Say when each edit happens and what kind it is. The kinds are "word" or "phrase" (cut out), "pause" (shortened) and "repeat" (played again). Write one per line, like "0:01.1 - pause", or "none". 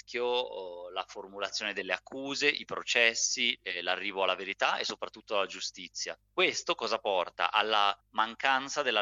0:06.2 - pause
0:08.0 - pause